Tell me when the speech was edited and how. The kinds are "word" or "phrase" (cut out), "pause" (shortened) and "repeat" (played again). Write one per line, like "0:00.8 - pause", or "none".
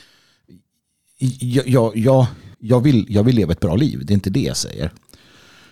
0:02.5 - pause